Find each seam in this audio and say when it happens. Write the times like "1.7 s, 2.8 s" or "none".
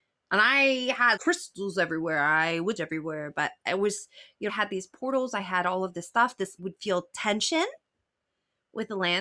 1.2 s, 2.8 s, 3.6 s, 4.5 s, 6.6 s